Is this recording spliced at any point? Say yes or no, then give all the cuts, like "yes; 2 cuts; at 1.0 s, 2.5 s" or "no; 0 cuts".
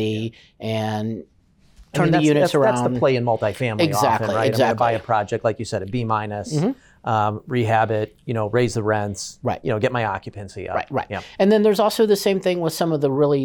no; 0 cuts